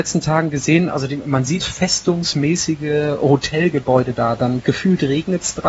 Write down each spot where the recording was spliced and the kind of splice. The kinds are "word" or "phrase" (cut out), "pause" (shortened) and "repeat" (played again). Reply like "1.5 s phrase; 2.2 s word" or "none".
1.6 s phrase